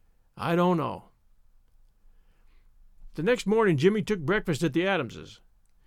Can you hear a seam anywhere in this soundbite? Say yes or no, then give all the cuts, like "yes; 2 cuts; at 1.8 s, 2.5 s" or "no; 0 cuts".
no; 0 cuts